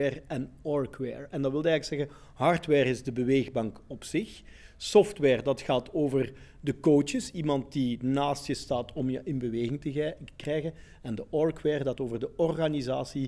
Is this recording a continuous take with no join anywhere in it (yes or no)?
no